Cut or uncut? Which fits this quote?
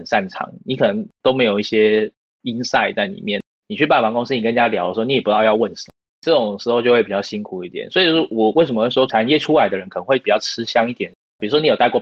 uncut